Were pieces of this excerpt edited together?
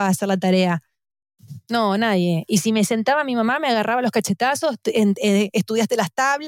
no; 0 cuts

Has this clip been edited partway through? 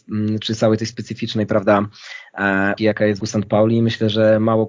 yes; 2 cuts; at 2.8 s, 3.2 s

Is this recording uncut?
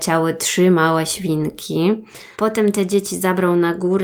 no; 1 cut; at 2.3 s

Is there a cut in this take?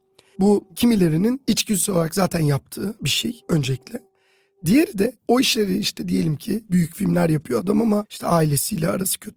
no; 0 cuts

